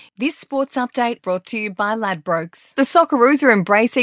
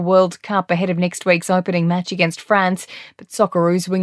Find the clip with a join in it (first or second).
first